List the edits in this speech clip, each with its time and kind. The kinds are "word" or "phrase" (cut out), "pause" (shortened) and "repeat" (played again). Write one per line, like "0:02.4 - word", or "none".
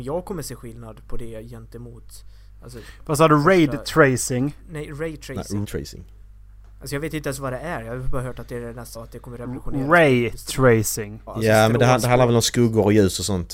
0:05.6 - word
0:08.9 - word
0:11.3 - word